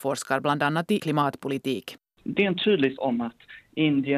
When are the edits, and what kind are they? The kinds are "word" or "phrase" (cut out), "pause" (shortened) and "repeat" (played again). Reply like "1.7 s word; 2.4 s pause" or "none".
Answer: 1.0 s word; 3.0 s word

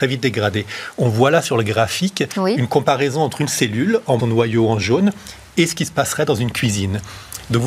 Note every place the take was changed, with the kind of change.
4.2 s phrase

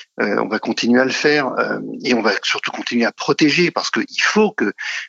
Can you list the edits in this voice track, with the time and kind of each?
none

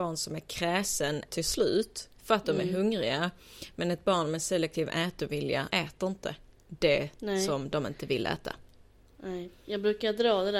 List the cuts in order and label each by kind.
1.3 s word; 2.2 s pause; 5.7 s word

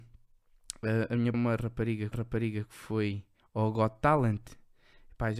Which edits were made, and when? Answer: 1.3 s phrase; 2.1 s repeat; 3.4 s pause

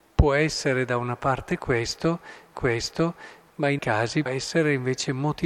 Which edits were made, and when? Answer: 2.5 s repeat; 3.8 s word; 4.3 s word

